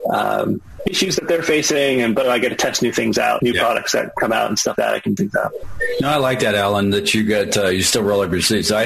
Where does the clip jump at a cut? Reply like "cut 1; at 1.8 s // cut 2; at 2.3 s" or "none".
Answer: cut 1; at 2.2 s // cut 2; at 3.4 s // cut 3; at 4.8 s // cut 4; at 5.2 s